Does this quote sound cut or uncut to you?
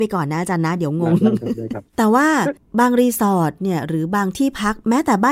cut